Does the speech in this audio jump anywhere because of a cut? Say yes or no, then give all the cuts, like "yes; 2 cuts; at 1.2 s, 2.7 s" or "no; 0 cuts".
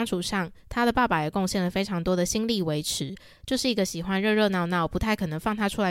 no; 0 cuts